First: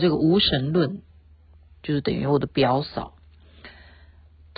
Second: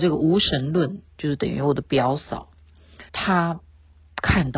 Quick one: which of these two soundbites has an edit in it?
second; 2 cuts; at 1.1 s, 3.1 s

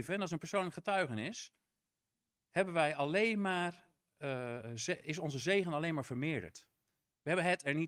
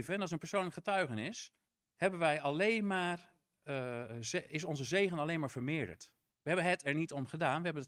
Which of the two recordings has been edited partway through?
second; 2 cuts; at 1.7 s, 6.3 s

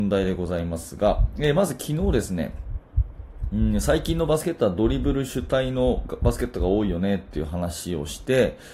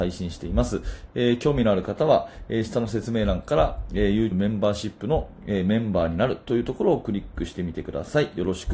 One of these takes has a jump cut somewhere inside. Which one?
second; 1 cut; at 4.3 s

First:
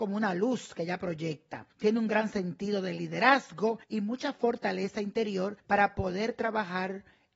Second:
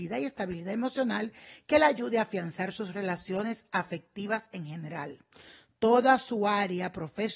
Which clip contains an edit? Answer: first; 3 cuts; at 1.7 s, 3.8 s, 5.6 s

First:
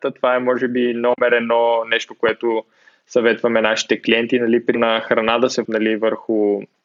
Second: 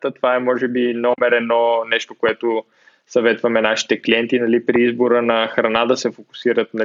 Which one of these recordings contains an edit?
first; 2 cuts; at 4.7 s, 5.6 s

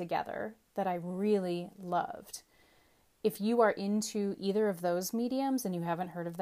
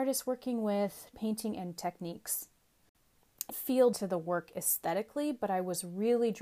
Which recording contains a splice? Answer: second; 4 cuts; at 1.1 s, 1.8 s, 3.5 s, 3.9 s

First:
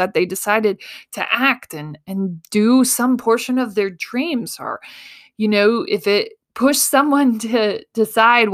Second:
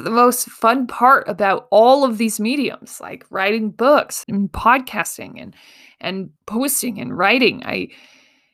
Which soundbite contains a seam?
second; 2 cuts; at 4.2 s, 6.4 s

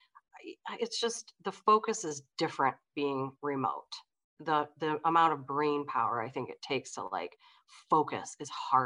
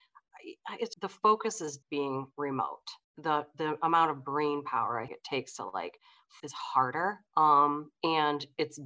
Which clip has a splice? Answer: second; 6 cuts; at 0.9 s, 1.8 s, 3.0 s, 5.1 s, 6.4 s, 7.3 s

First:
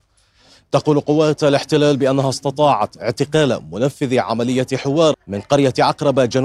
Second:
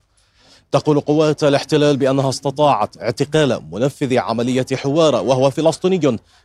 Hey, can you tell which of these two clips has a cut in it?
first; 1 cut; at 5.1 s

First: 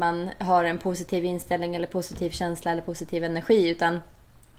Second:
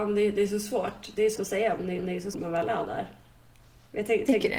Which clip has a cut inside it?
second; 3 cuts; at 1.3 s, 2.0 s, 2.3 s

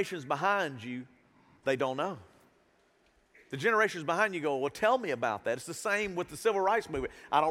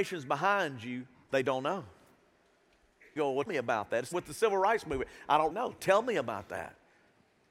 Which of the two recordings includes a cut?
second; 5 cuts; at 1.1 s, 3.2 s, 3.5 s, 4.1 s, 5.5 s

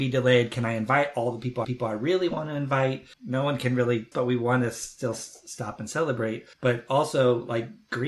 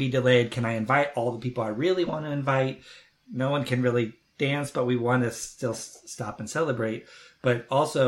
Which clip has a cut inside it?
first; 4 cuts; at 1.6 s, 3.1 s, 4.1 s, 6.5 s

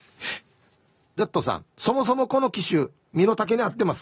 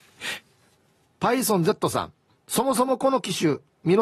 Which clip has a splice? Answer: first; 2 cuts; at 1.2 s, 1.7 s

